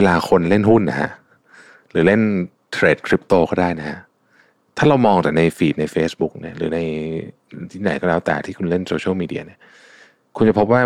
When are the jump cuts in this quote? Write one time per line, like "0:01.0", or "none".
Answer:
none